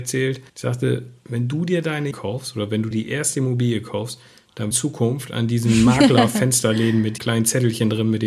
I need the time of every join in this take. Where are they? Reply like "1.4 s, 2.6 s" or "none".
2.1 s, 2.9 s, 4.7 s, 7.2 s